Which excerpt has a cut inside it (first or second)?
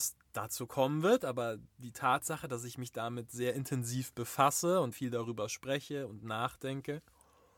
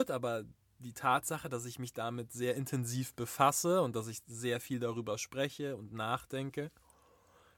first